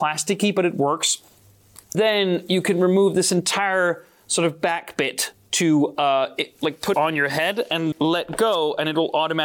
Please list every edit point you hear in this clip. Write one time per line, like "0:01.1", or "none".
0:01.9
0:06.9
0:07.9